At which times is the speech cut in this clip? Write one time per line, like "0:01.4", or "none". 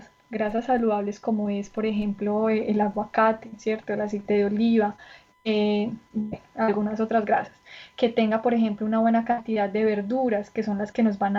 none